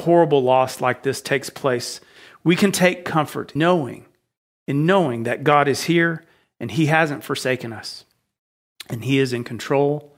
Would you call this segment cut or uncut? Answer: cut